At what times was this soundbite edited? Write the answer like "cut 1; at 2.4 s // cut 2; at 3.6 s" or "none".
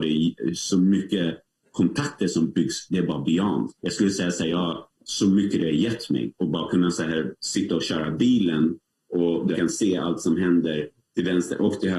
cut 1; at 2.9 s // cut 2; at 3.8 s // cut 3; at 5.0 s // cut 4; at 9.5 s